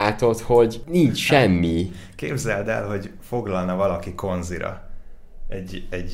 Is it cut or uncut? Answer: uncut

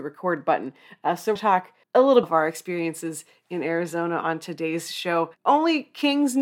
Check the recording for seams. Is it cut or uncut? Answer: cut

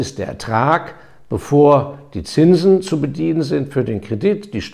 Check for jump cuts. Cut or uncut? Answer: uncut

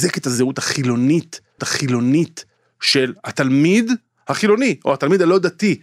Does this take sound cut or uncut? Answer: cut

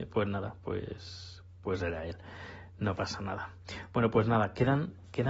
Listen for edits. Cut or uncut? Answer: uncut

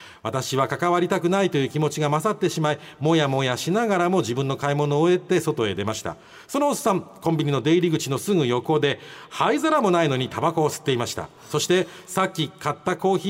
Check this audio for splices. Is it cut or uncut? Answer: uncut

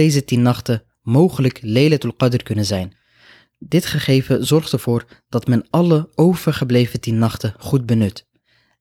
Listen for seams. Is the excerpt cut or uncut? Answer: uncut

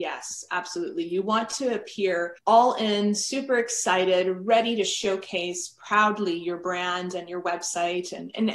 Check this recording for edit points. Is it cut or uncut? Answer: cut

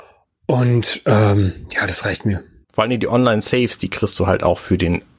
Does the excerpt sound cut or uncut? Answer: cut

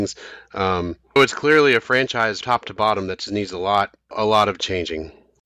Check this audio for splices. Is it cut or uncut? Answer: cut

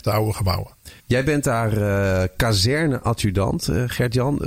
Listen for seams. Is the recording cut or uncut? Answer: cut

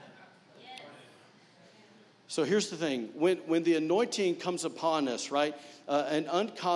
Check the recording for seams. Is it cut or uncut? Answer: uncut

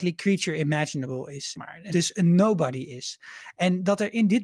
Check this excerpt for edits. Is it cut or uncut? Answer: cut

